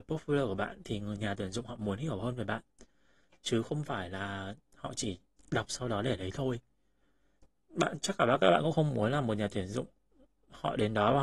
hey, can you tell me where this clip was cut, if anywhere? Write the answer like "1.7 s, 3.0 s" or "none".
none